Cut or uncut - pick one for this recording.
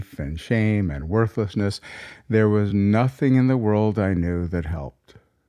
uncut